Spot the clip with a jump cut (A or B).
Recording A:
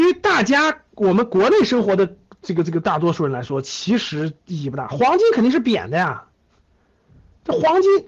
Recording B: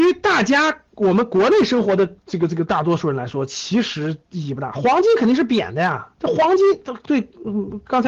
B